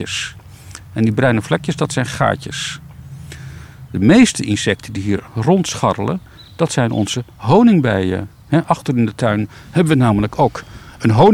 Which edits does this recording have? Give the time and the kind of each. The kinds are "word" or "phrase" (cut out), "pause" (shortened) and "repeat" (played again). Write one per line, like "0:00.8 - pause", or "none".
0:05.3 - pause